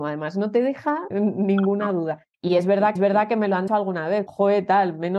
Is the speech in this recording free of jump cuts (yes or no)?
no